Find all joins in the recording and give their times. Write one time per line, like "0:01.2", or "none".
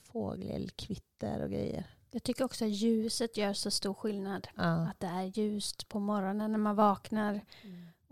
none